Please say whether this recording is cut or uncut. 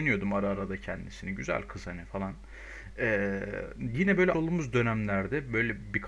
cut